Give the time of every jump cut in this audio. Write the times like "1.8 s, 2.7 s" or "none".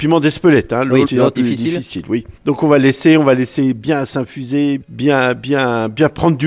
1.1 s, 1.4 s, 2.4 s, 4.8 s

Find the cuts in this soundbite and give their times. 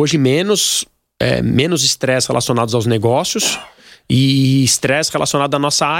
none

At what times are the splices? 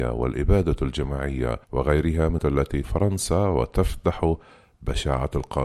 1.6 s, 2.4 s, 2.8 s

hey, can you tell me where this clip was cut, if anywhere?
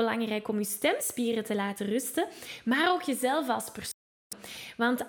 none

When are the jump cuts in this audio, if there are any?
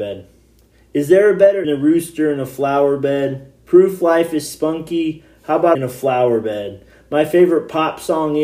1.6 s, 3.6 s, 5.7 s

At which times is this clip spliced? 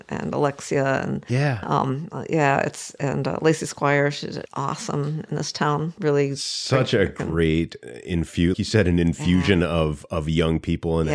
4.5 s, 6.0 s, 8.5 s

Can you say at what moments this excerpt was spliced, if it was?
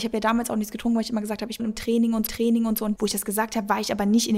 1.6 s, 2.3 s, 3.0 s

